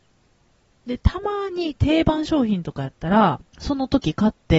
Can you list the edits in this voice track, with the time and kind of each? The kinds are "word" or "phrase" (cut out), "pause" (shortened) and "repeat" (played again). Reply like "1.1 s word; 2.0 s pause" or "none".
3.5 s pause